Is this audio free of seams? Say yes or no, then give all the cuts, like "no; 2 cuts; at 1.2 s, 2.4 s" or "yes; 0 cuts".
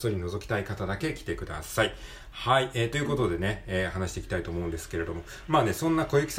yes; 0 cuts